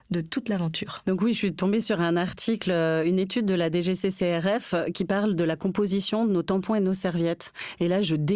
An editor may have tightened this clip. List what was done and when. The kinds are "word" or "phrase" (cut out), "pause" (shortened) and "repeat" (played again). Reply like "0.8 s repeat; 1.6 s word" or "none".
none